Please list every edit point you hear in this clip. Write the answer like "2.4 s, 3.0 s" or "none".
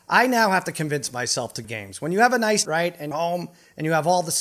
1.6 s, 2.6 s, 3.1 s